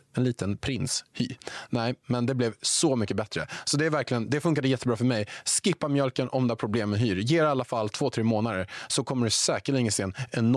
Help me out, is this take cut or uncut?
uncut